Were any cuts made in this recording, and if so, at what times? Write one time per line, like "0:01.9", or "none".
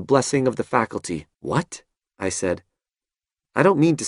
0:01.3

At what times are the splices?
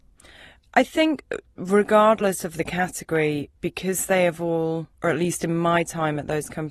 0:03.6
0:04.9

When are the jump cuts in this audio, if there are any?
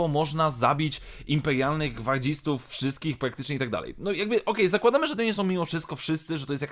none

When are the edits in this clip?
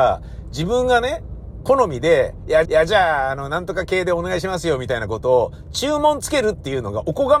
0:02.6

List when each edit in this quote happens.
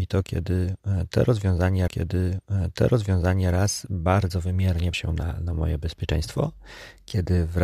0:01.9
0:04.9

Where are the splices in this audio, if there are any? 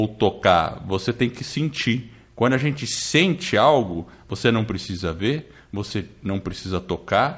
none

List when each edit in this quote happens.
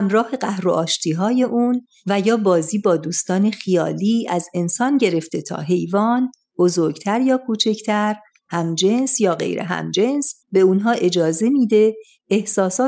0:10.4

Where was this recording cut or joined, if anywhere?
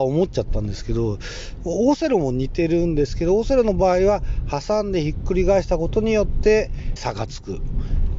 0:07.0

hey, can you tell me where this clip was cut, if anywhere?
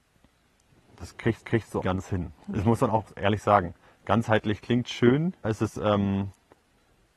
0:01.4
0:01.8
0:02.4
0:03.8
0:05.4

